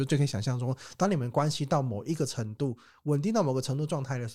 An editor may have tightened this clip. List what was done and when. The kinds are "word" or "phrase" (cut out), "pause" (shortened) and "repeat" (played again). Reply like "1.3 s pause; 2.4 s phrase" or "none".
none